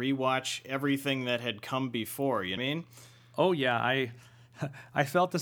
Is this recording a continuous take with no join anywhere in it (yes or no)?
no